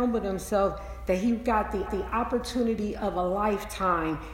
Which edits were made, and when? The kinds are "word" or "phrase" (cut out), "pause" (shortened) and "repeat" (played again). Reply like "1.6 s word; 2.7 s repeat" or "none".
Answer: 1.9 s repeat